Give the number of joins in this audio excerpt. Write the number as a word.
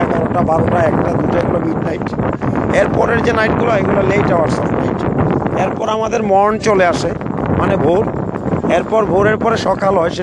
zero